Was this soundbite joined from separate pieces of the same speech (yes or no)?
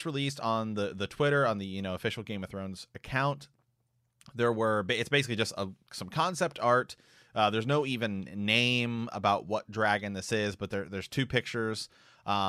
no